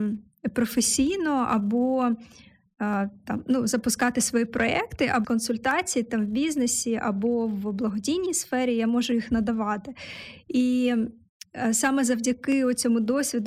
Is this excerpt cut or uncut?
cut